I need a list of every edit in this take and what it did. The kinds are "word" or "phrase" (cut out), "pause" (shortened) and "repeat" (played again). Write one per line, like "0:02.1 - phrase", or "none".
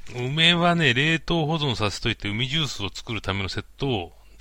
none